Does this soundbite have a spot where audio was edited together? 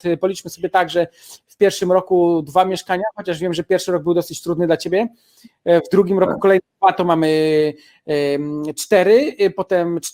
no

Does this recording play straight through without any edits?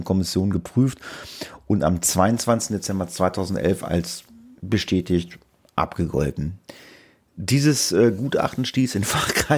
yes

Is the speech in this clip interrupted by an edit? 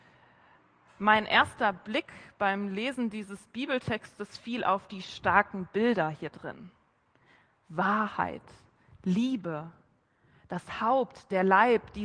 yes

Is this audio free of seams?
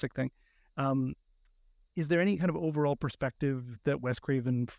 yes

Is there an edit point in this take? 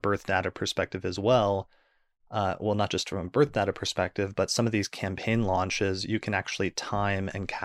no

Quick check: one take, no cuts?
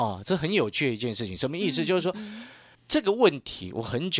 yes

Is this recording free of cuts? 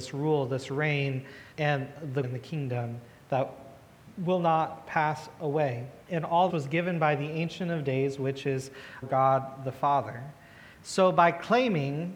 no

